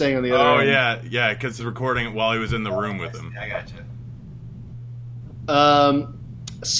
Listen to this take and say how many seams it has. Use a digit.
1